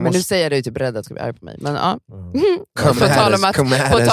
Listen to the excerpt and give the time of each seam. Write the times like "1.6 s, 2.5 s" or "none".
1.0 s

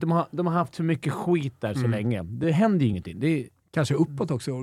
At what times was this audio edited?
none

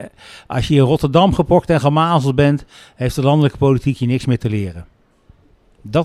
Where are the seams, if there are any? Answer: none

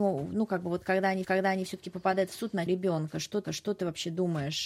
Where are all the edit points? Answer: 1.2 s, 2.7 s, 3.4 s

